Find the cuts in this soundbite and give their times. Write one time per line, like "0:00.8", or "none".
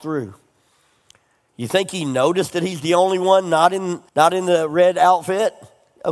0:04.1